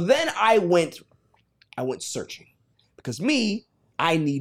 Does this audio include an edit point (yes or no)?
yes